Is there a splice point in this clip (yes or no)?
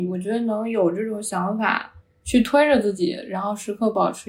yes